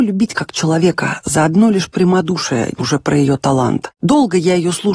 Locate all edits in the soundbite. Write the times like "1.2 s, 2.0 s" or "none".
2.8 s